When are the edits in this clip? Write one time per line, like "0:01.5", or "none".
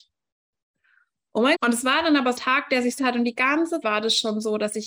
0:01.5
0:02.4
0:03.0
0:03.8